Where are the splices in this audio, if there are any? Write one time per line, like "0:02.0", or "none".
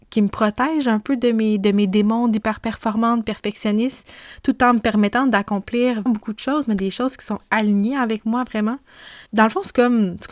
0:06.1
0:09.3

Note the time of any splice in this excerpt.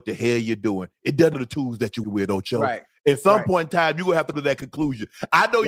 0:01.3
0:02.0
0:04.3

